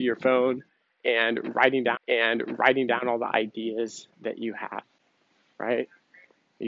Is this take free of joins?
no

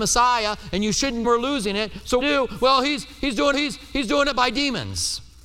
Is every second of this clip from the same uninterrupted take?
no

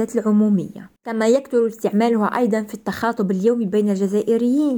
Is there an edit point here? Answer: yes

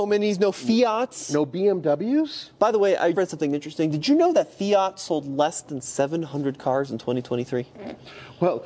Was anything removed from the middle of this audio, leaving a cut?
yes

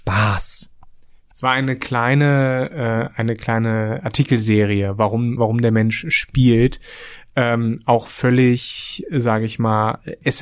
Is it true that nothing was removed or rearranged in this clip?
no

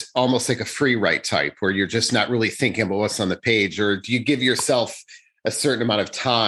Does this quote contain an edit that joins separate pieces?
no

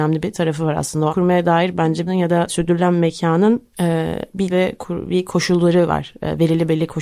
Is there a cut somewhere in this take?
yes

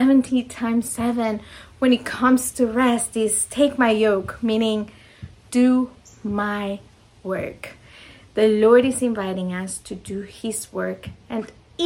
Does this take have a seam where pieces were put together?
no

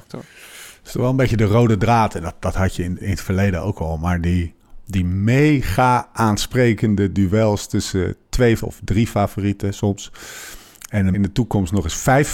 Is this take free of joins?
no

